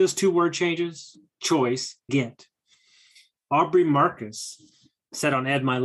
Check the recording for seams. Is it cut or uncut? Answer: cut